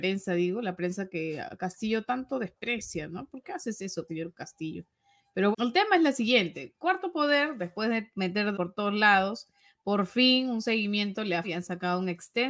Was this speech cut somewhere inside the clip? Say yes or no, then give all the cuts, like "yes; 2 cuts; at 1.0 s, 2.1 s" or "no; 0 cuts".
yes; 4 cuts; at 4.1 s, 5.5 s, 8.5 s, 11.4 s